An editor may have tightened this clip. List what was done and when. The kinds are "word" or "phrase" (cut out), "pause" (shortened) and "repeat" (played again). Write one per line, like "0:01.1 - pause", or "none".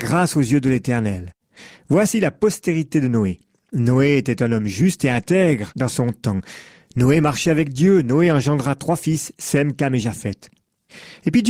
none